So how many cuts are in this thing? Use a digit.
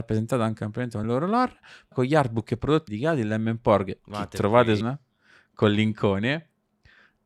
4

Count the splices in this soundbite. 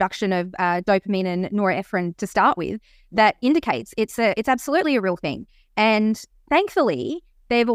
1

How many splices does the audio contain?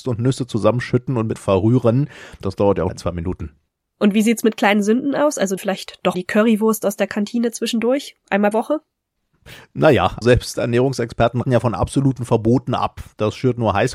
7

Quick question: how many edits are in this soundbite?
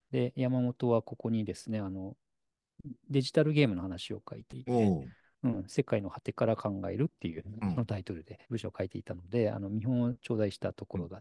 1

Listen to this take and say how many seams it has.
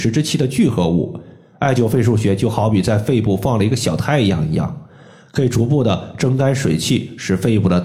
0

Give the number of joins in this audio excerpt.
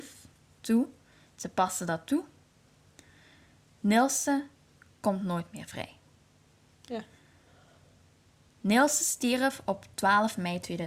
0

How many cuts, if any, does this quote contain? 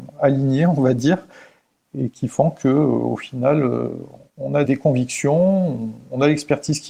1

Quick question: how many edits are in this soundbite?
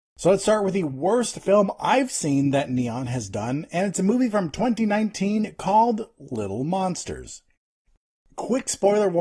0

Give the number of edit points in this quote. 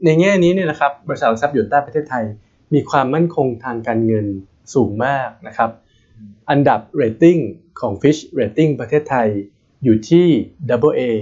0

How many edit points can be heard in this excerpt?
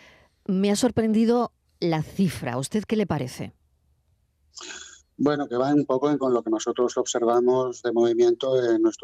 1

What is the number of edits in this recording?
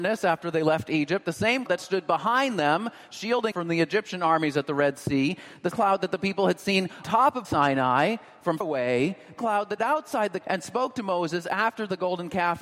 9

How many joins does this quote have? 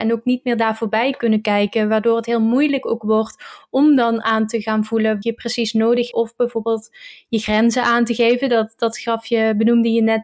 2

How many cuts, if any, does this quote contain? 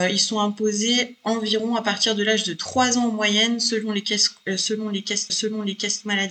1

